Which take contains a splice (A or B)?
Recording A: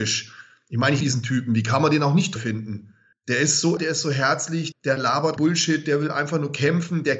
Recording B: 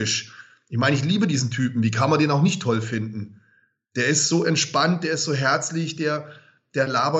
A